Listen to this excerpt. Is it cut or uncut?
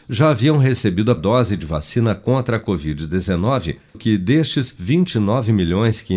cut